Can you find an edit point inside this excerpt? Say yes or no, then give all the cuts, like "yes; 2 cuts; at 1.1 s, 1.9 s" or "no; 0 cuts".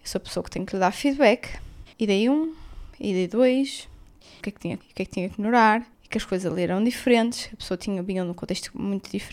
yes; 4 cuts; at 1.9 s, 4.4 s, 4.8 s, 5.9 s